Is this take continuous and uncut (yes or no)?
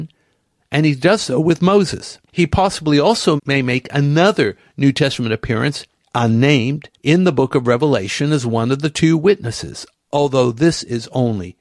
no